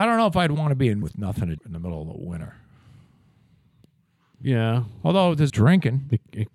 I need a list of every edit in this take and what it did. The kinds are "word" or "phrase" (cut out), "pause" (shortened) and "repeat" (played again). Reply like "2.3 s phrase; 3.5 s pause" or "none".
1.0 s word; 1.6 s word; 5.5 s word